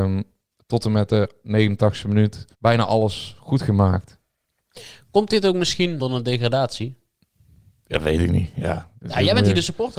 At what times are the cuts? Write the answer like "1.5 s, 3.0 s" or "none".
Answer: 2.5 s, 6.0 s